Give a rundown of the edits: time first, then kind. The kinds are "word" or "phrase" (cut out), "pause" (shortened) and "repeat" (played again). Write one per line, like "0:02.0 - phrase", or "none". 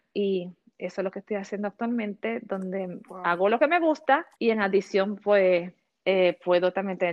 0:04.3 - pause
0:05.8 - pause